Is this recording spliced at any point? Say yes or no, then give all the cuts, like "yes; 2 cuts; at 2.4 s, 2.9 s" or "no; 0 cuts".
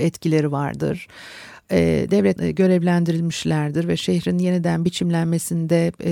yes; 1 cut; at 2.4 s